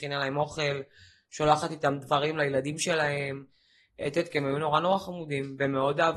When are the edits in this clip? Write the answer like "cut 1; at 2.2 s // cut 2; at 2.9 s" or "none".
none